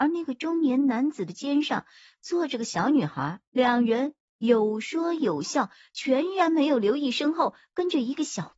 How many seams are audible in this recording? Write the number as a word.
one